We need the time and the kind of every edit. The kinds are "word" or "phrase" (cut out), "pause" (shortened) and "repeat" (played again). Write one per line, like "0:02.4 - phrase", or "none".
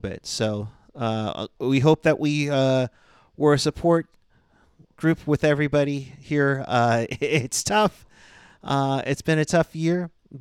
none